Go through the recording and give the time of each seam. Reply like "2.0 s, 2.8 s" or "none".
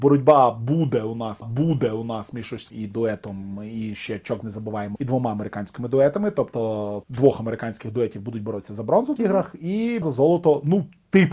1.4 s, 2.7 s, 4.4 s, 5.0 s, 7.0 s, 9.2 s, 10.0 s

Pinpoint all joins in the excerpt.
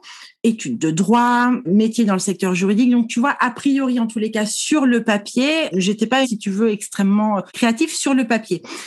1.6 s, 5.7 s, 6.2 s, 7.5 s

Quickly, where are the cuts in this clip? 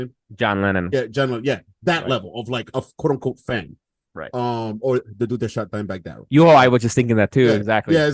none

